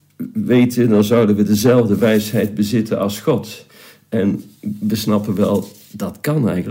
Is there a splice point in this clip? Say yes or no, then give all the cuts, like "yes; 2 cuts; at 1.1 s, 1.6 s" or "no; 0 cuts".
no; 0 cuts